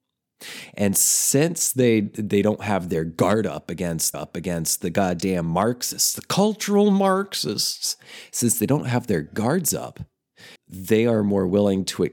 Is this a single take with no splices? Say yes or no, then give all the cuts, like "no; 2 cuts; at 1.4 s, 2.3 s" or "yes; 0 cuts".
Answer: no; 2 cuts; at 4.1 s, 10.6 s